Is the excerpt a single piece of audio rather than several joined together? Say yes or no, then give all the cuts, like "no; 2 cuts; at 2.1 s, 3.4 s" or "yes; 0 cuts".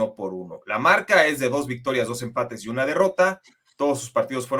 yes; 0 cuts